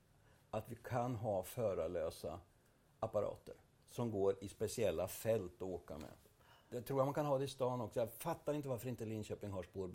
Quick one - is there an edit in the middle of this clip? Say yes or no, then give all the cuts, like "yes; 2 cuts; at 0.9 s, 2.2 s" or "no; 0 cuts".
no; 0 cuts